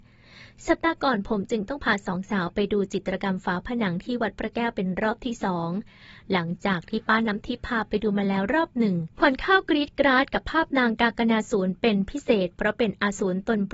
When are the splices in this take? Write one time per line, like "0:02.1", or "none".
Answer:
0:09.1